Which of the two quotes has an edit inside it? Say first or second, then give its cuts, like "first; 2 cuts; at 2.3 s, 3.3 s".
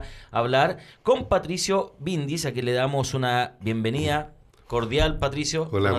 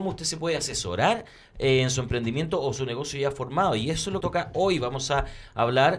second; 1 cut; at 4.2 s